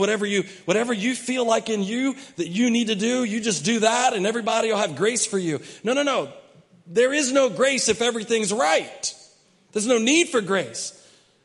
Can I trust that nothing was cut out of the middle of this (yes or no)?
yes